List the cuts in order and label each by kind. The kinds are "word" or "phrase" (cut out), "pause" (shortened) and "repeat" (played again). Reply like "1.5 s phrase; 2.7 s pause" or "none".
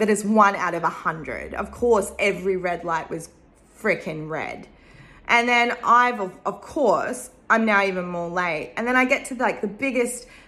none